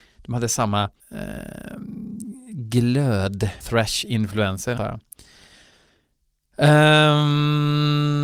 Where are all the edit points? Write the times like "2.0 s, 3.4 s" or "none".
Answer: 1.0 s, 3.6 s, 4.8 s

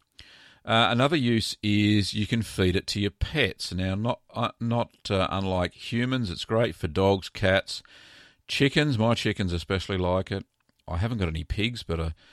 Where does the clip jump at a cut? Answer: none

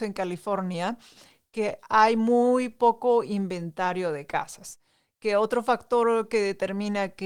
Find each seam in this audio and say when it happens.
none

